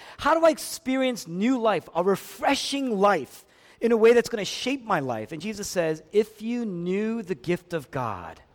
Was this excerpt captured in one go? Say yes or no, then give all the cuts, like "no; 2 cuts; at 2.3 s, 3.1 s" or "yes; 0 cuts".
yes; 0 cuts